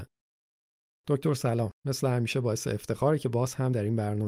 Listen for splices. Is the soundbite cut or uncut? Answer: cut